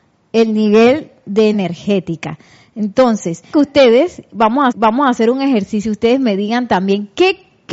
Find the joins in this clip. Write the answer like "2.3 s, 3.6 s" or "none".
1.5 s, 3.5 s, 4.7 s